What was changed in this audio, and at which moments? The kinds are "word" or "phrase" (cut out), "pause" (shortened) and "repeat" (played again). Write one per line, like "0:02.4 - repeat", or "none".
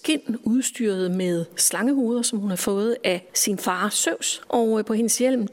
none

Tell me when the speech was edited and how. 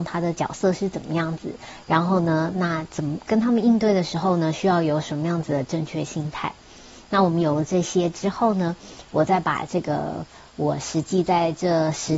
none

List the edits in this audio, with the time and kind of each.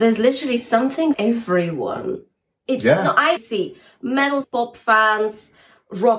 0:01.1 - word
0:03.4 - word
0:04.4 - word

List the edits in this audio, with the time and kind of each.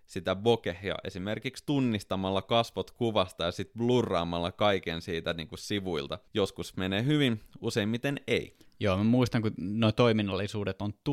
0:06.3 - pause

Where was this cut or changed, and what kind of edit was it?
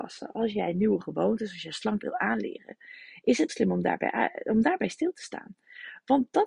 0:02.0 - word
0:03.5 - word

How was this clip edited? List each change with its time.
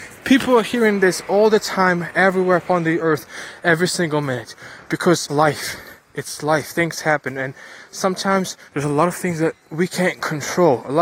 0:03.0 - phrase
0:05.3 - word
0:08.7 - pause
0:09.6 - pause

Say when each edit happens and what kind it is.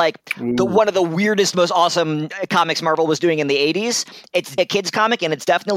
0:04.6 - word

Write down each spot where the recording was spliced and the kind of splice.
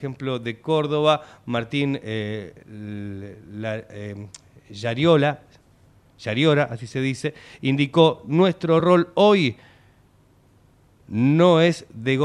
none

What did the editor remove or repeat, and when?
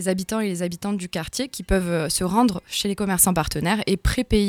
none

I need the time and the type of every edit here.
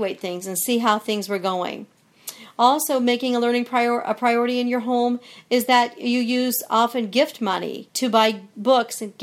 0:07.9 - pause

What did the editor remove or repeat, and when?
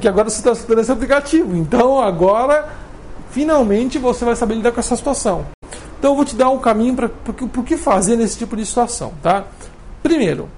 none

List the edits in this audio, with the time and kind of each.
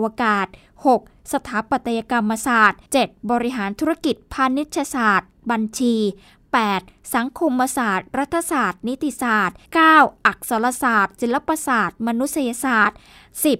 0:02.9 - pause
0:09.7 - pause

